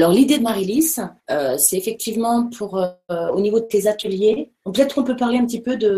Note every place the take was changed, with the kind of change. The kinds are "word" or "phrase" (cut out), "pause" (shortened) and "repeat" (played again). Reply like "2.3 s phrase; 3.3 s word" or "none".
1.2 s pause

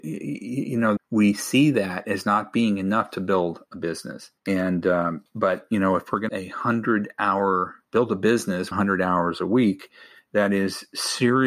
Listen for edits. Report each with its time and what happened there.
1.0 s word; 4.4 s pause; 5.3 s pause; 6.3 s phrase; 7.8 s pause; 8.7 s phrase

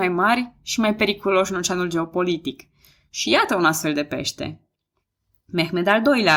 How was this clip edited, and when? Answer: none

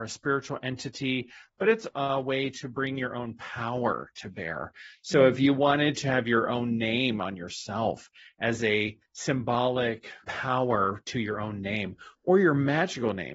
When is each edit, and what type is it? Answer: 1.9 s word; 10.2 s word

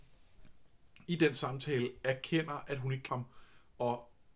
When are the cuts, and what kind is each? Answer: 3.1 s word

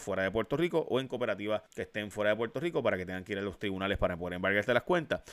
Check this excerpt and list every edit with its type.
1.7 s pause

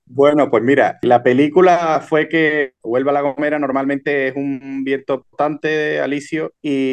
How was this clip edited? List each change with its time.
2.8 s word

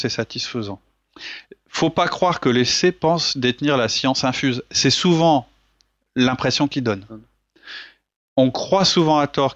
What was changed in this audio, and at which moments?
none

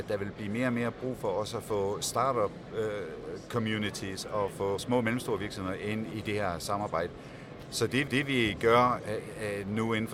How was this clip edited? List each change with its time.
4.8 s word; 6.1 s word; 8.1 s repeat

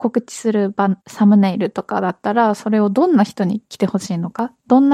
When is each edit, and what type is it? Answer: 1.0 s pause

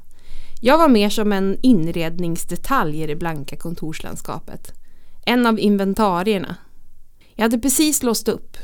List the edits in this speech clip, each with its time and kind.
7.2 s pause

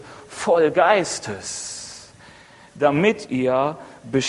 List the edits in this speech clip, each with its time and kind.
none

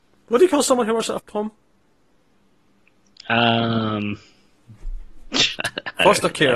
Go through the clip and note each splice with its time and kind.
1.2 s word

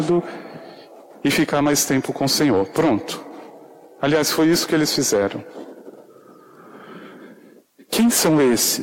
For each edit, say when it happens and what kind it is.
none

